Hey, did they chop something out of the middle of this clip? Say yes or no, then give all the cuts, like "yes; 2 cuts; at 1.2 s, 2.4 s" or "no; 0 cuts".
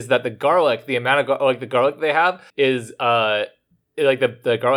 yes; 1 cut; at 2.5 s